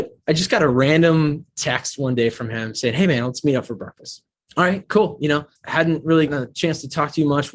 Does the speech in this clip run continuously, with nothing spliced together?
no; 3 cuts; at 4.3 s, 5.6 s, 6.3 s

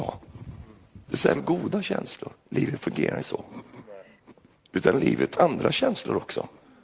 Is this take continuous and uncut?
no; 6 cuts; at 1.0 s, 1.4 s, 2.4 s, 3.2 s, 4.6 s, 5.4 s

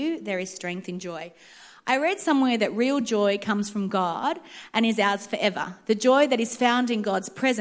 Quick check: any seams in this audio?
no; 0 cuts

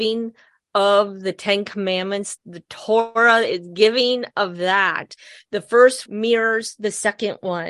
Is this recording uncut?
no; 2 cuts; at 2.4 s, 6.1 s

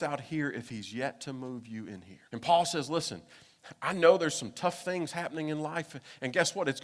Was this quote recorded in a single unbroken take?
no; 1 cut; at 2.2 s

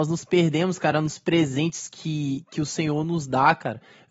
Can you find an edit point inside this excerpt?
no; 0 cuts

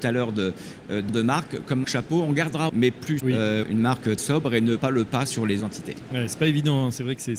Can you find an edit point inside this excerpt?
yes; 8 cuts; at 1.1 s, 1.8 s, 2.7 s, 3.2 s, 3.6 s, 4.2 s, 4.8 s, 5.6 s

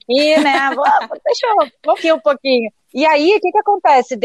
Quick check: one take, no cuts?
no; 1 cut; at 2.0 s

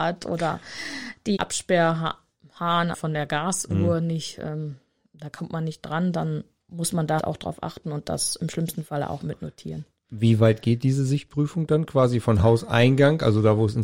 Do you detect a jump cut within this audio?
yes; 3 cuts; at 1.4 s, 2.9 s, 7.2 s

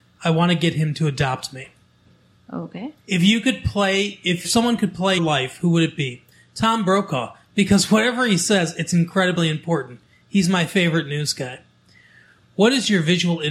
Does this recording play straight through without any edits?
no; 3 cuts; at 3.0 s, 4.4 s, 5.2 s

